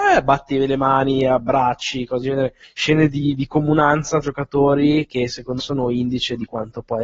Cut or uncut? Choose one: cut